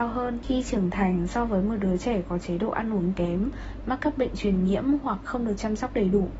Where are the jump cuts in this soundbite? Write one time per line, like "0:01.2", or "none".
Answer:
none